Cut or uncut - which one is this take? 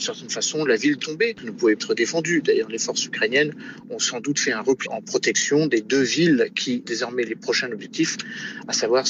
cut